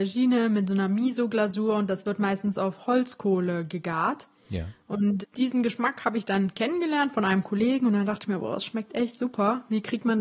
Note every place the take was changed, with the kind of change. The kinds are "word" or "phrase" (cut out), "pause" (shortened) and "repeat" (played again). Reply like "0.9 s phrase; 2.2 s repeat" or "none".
5.2 s word

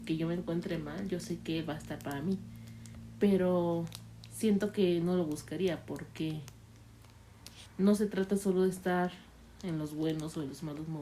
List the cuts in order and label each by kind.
none

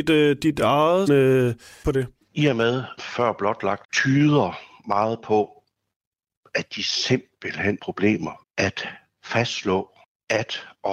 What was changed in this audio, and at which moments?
1.1 s word; 1.8 s word; 3.0 s word; 3.8 s word; 7.8 s word; 8.4 s word

